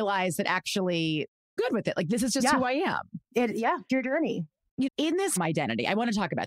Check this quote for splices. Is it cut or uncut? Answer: cut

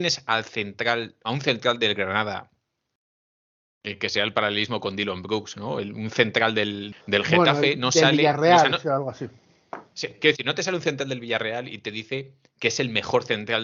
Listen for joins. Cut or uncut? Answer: cut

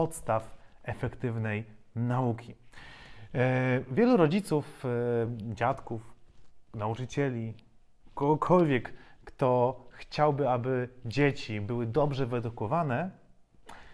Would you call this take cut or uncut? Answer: uncut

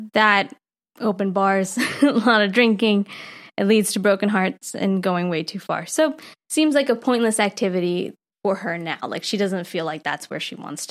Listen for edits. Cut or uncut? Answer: uncut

